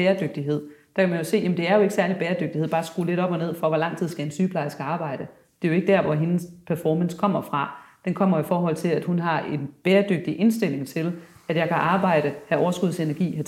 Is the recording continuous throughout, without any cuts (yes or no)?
yes